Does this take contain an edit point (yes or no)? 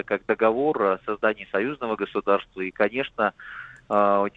no